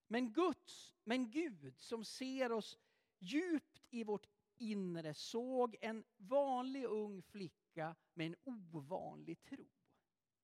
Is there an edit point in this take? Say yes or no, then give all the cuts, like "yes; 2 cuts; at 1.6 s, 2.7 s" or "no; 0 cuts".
no; 0 cuts